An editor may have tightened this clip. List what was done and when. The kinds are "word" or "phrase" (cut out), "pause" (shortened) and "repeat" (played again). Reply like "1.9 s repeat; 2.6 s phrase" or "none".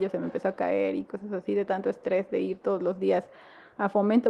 none